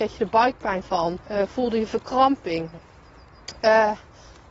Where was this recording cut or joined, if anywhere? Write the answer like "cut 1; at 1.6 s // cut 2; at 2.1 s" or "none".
cut 1; at 1.2 s